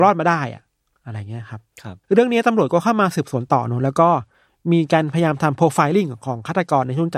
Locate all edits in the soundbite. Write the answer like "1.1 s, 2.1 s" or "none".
2.0 s